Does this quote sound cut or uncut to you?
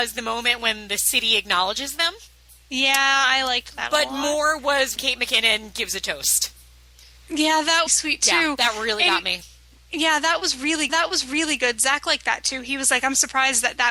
cut